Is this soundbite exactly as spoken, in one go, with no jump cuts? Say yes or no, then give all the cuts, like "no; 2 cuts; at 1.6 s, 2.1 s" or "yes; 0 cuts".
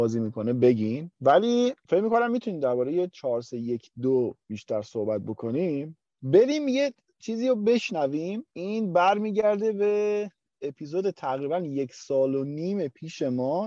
yes; 0 cuts